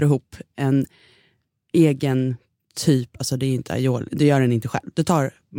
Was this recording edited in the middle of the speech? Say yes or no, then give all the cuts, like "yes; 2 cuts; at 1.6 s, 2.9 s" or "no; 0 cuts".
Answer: no; 0 cuts